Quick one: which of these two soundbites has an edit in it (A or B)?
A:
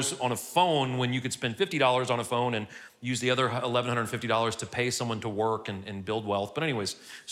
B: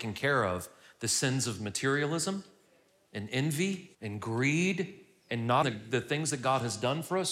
B